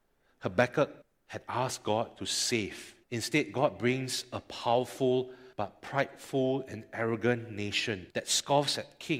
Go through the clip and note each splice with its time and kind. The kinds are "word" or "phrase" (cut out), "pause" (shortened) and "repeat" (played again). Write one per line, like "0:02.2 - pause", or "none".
0:01.0 - pause
0:03.0 - pause
0:05.5 - pause
0:08.1 - pause